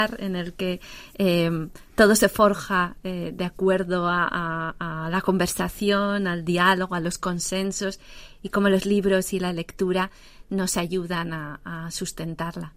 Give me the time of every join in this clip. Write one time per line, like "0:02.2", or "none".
none